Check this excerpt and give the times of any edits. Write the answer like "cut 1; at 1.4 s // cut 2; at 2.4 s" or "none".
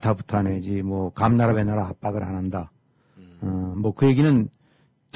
none